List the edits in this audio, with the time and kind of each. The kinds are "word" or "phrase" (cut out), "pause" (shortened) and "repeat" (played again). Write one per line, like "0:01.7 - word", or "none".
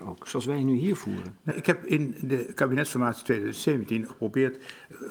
0:01.5 - word
0:04.1 - phrase